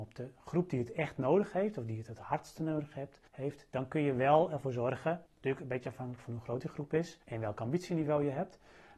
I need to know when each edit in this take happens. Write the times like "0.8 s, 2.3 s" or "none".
3.3 s, 5.3 s, 7.2 s